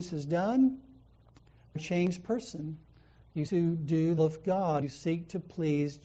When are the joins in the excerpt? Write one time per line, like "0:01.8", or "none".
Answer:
0:01.8
0:03.5
0:04.2
0:04.8